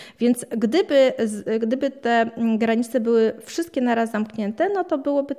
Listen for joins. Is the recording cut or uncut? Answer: uncut